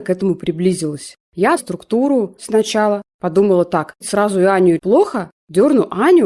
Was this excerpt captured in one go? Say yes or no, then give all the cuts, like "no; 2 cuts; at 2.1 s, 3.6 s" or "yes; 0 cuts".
no; 4 cuts; at 1.6 s, 2.4 s, 4.0 s, 4.8 s